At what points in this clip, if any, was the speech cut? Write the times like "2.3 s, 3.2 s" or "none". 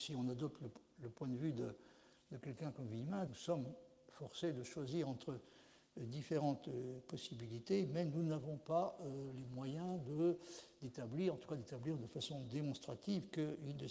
3.3 s